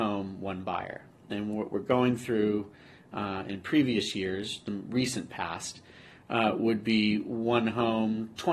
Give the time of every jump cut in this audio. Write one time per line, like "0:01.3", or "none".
none